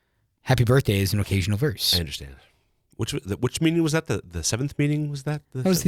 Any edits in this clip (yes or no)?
no